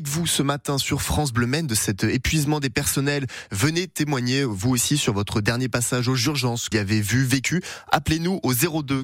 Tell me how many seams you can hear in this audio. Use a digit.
1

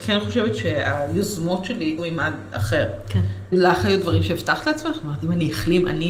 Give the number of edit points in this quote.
1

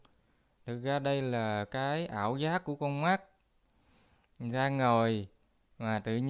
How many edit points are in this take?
0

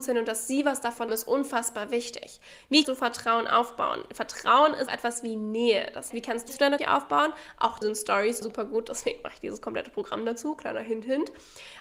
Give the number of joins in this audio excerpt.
8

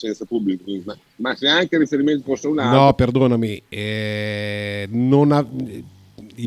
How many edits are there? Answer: 0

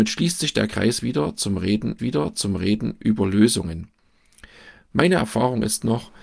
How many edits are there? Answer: 1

